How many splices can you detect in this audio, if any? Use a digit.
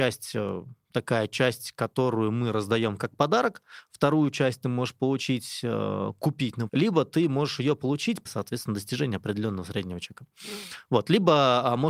2